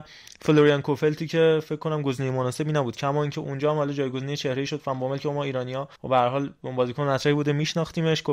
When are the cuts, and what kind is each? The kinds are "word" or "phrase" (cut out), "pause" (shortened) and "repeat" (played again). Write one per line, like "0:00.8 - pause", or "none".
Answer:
0:06.0 - pause

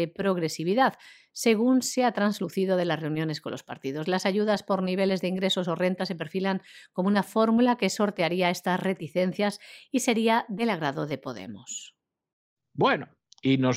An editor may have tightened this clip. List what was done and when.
none

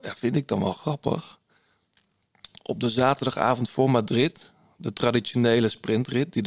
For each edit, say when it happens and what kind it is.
none

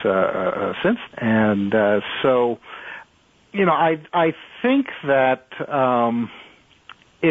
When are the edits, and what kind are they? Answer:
0:01.1 - word

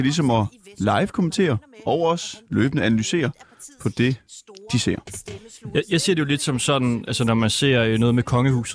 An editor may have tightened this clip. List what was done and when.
none

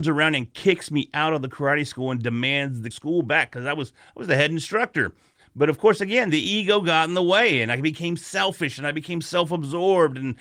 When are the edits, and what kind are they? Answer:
0:02.9 - phrase

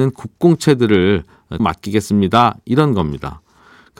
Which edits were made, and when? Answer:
0:01.6 - word

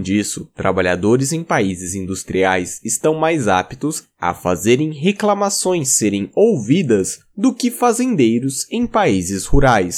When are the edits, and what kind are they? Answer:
none

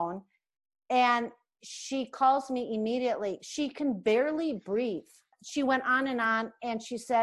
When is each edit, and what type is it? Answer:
none

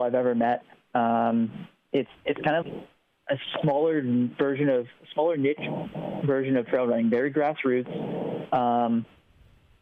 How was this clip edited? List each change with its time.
0:02.6 - word

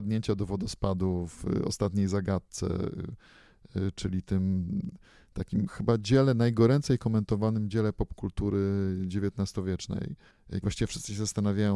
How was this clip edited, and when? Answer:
0:10.6 - word

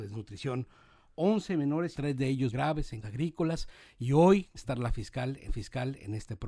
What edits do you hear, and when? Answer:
0:01.9 - word
0:02.5 - word
0:03.0 - word
0:04.6 - phrase
0:05.5 - repeat

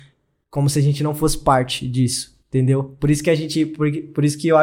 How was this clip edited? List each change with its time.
0:02.4 - pause

